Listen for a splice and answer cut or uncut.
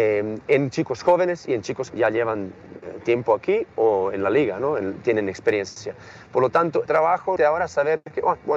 cut